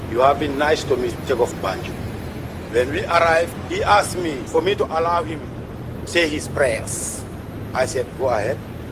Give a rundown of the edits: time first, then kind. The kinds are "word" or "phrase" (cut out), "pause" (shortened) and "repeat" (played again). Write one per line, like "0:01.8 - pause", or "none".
0:01.1 - word
0:01.5 - word
0:06.1 - word